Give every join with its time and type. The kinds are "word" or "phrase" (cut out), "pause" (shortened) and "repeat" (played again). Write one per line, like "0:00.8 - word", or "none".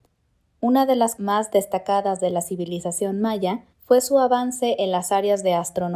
0:01.2 - word
0:03.7 - pause